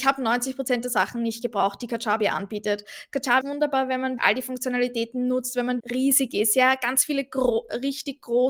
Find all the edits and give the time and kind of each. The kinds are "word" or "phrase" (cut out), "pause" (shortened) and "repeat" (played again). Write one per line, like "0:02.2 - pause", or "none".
0:03.4 - word
0:04.2 - word
0:05.8 - word